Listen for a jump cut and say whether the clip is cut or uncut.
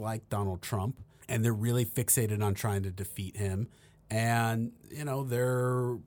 uncut